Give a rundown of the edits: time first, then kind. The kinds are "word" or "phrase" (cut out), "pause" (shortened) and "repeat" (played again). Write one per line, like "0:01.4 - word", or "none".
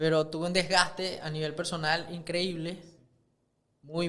none